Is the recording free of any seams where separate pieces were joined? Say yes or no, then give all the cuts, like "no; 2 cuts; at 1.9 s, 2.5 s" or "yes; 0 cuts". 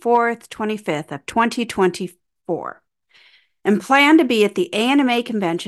yes; 0 cuts